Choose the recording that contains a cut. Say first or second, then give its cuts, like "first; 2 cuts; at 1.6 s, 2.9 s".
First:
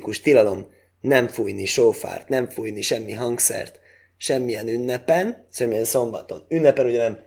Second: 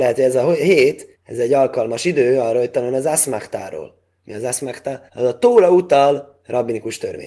second; 2 cuts; at 1.1 s, 5.1 s